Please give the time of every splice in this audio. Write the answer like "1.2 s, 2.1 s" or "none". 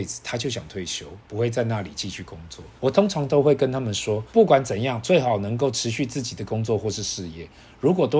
2.8 s, 4.3 s